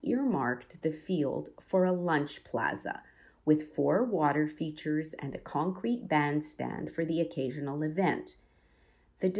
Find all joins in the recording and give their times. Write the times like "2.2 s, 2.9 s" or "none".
none